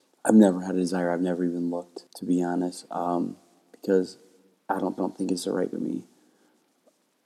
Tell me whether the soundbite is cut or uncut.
cut